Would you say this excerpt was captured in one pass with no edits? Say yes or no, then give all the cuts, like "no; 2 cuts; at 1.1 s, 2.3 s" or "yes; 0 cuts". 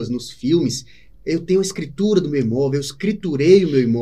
yes; 0 cuts